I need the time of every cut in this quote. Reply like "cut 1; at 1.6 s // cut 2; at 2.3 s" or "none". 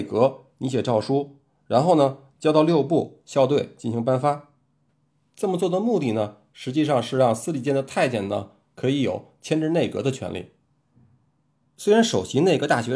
none

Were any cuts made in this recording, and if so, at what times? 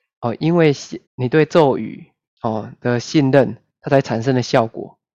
cut 1; at 1.1 s // cut 2; at 2.3 s

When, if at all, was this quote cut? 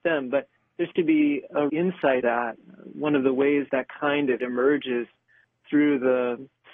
cut 1; at 0.9 s // cut 2; at 1.7 s // cut 3; at 2.2 s // cut 4; at 3.7 s // cut 5; at 4.4 s

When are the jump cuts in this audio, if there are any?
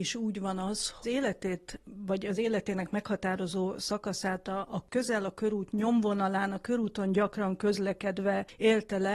cut 1; at 1.0 s // cut 2; at 4.9 s

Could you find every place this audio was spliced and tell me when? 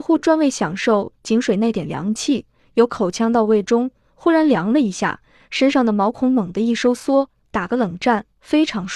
none

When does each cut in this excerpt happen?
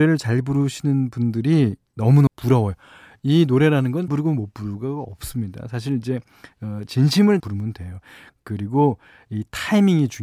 cut 1; at 2.3 s // cut 2; at 4.1 s // cut 3; at 7.4 s

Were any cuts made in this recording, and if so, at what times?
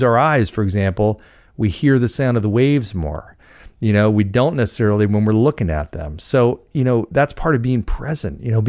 none

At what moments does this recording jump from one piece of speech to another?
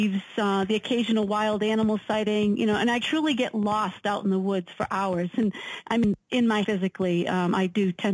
cut 1; at 3.0 s // cut 2; at 6.6 s

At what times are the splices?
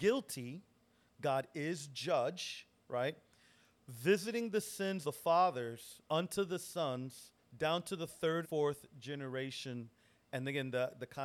cut 1; at 5.0 s // cut 2; at 6.1 s // cut 3; at 7.4 s // cut 4; at 8.4 s

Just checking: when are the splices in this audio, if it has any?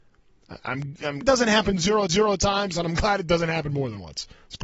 cut 1; at 1.2 s // cut 2; at 2.1 s

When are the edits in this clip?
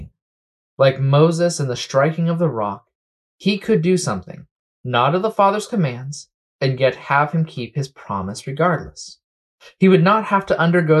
none

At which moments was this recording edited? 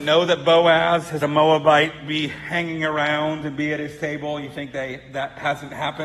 cut 1; at 1.2 s

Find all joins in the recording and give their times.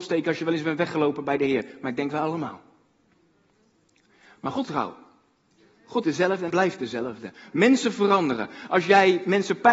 cut 1; at 4.6 s // cut 2; at 6.0 s // cut 3; at 6.5 s

